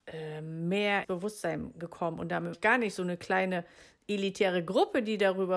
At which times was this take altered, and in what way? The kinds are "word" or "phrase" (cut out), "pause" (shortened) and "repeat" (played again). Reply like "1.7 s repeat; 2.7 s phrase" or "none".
1.0 s word; 2.5 s word